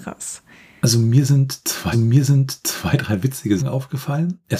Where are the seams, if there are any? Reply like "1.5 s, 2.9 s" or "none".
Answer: 1.9 s, 3.6 s